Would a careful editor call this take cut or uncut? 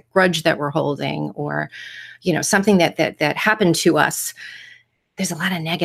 uncut